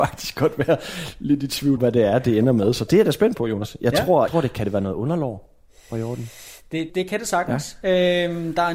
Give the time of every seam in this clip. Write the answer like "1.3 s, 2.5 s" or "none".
1.8 s, 4.3 s, 6.9 s